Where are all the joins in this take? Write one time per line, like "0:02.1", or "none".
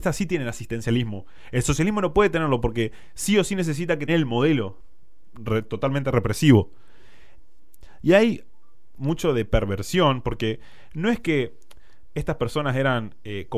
0:04.1
0:09.0

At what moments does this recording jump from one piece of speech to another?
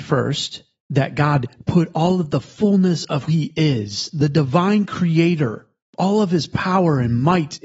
0:03.3

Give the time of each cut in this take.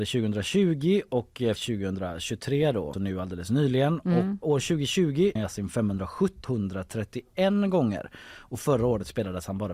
0:01.6
0:02.9
0:04.4
0:05.4
0:06.4

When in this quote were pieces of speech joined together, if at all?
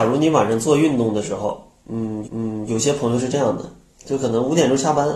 0:02.2

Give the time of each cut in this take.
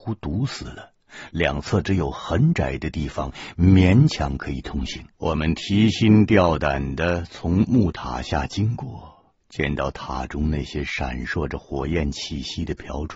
0:05.1
0:09.4

